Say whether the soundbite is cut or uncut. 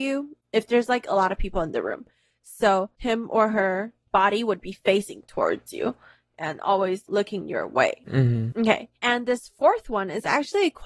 cut